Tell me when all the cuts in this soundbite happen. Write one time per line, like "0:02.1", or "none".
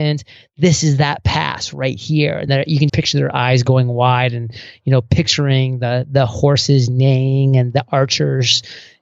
0:02.5
0:02.9